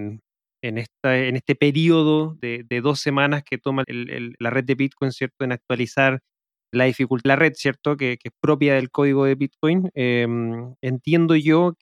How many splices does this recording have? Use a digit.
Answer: 4